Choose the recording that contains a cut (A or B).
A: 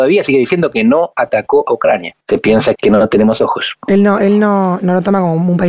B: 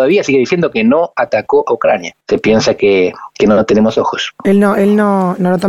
A